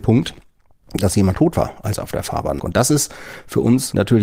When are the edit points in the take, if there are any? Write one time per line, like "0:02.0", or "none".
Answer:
0:01.3
0:02.6